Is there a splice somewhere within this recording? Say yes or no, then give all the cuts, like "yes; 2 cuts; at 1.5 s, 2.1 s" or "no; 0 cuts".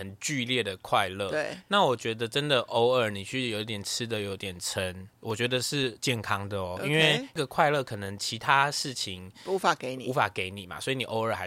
yes; 1 cut; at 5.2 s